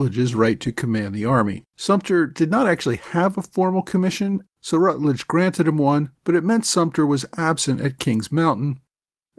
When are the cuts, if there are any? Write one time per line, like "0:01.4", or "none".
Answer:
0:01.7
0:04.5
0:06.2